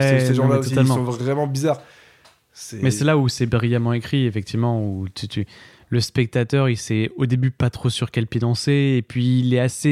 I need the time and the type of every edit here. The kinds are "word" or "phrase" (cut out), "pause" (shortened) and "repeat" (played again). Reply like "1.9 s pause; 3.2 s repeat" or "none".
none